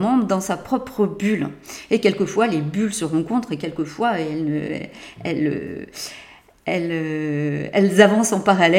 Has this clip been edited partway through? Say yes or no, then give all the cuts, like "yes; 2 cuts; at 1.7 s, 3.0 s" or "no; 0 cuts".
no; 0 cuts